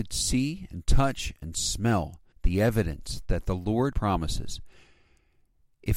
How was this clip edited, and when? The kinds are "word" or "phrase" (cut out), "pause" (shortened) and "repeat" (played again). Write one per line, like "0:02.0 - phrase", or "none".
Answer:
0:02.3 - pause
0:03.9 - phrase